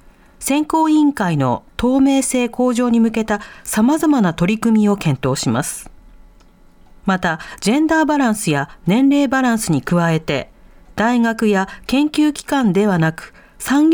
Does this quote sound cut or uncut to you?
uncut